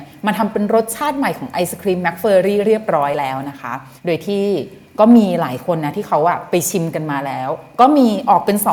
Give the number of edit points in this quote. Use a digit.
1